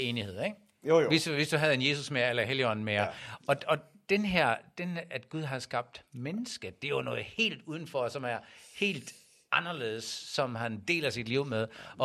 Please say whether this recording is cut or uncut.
uncut